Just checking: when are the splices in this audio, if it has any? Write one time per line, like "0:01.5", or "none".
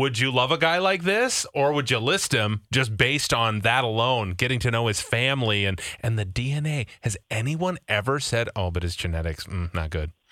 none

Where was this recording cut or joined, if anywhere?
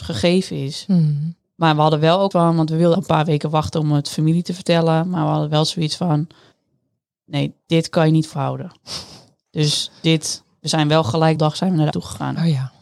0:02.3
0:02.9
0:08.3
0:11.4
0:11.9

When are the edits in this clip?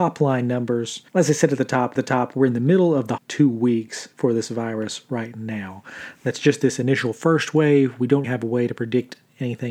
0:01.1
0:02.0
0:03.2
0:08.2

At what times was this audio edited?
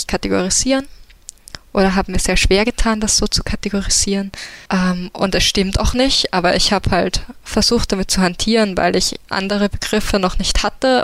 0:04.7

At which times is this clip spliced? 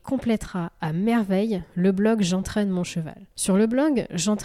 0:03.3

